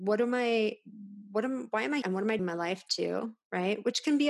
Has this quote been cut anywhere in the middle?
yes; 2 cuts; at 2.0 s, 2.4 s

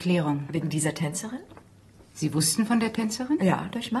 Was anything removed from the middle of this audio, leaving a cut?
yes; 1 cut; at 2.1 s

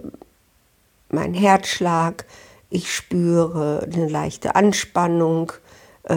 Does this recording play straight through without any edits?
yes; 0 cuts

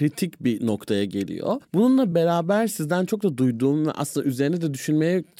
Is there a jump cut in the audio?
no; 0 cuts

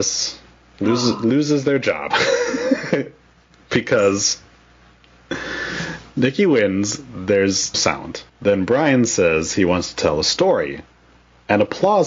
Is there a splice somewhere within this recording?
yes; 2 cuts; at 7.7 s, 8.3 s

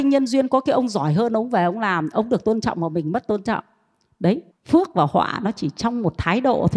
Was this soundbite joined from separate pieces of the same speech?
yes; 1 cut; at 4.5 s

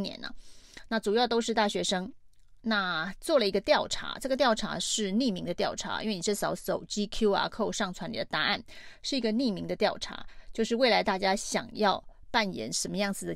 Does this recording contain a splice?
no; 0 cuts

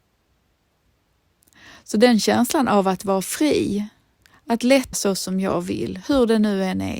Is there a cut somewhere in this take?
yes; 2 cuts; at 4.2 s, 4.9 s

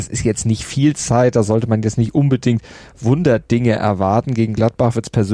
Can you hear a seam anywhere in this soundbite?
no; 0 cuts

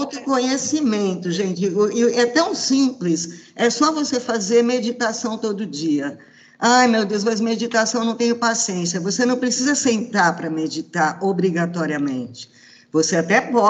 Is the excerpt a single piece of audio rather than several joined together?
yes; 0 cuts

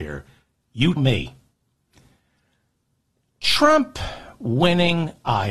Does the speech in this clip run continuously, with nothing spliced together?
no; 1 cut; at 1.0 s

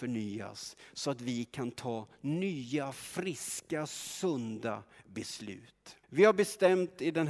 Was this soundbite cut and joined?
yes; 1 cut; at 6.0 s

